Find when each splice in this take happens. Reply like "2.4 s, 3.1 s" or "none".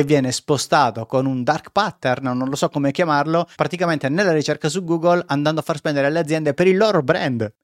3.5 s